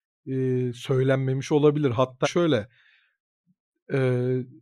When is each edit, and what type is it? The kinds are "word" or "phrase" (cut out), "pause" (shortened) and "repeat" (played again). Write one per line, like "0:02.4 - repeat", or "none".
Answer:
0:02.2 - word